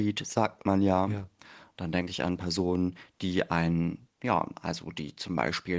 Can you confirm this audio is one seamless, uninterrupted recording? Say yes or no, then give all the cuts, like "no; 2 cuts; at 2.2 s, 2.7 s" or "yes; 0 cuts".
no; 1 cut; at 4.1 s